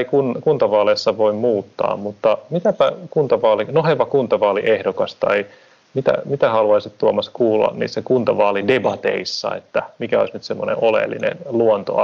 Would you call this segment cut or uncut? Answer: uncut